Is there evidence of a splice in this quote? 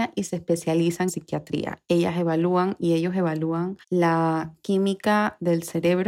yes; 2 cuts; at 1.1 s, 3.8 s

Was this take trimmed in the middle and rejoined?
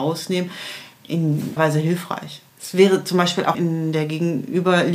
yes; 3 cuts; at 1.6 s, 2.5 s, 3.5 s

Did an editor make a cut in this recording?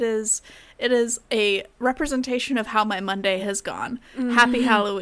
no; 0 cuts

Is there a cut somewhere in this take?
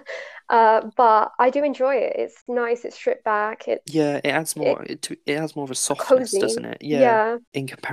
no; 0 cuts

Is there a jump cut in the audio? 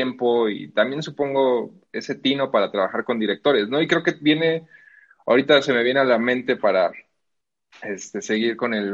no; 0 cuts

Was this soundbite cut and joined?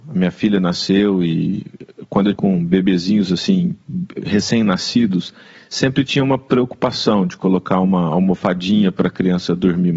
yes; 1 cut; at 2.3 s

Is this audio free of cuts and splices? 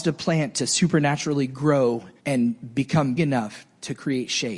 no; 2 cuts; at 2.2 s, 3.2 s

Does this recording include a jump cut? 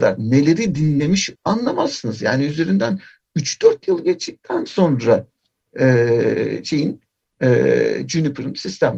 yes; 1 cut; at 1.4 s

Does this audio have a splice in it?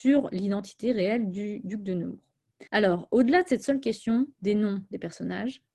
yes; 1 cut; at 2.7 s

